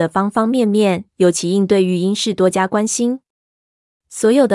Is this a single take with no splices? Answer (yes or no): no